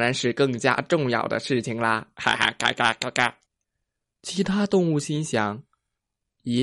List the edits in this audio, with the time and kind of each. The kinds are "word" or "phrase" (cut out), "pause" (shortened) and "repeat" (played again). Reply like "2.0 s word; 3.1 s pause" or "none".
3.5 s pause